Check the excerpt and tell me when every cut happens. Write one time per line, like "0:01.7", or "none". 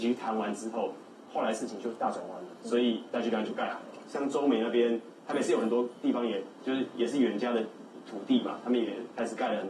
none